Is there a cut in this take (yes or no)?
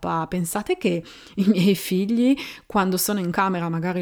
no